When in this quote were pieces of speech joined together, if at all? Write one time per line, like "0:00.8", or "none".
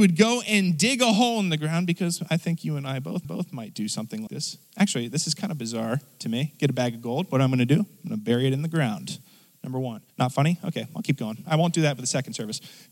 0:03.2
0:04.3
0:10.1